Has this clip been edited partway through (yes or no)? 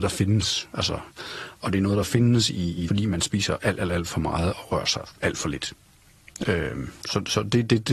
yes